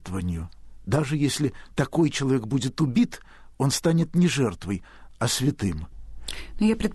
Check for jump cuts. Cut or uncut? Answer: uncut